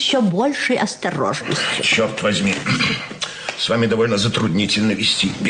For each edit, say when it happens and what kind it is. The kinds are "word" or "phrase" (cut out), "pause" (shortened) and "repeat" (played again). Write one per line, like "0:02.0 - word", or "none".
none